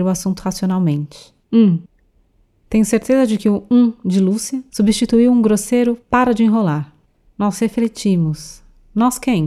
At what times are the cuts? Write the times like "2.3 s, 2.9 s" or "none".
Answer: 1.4 s, 6.0 s, 7.0 s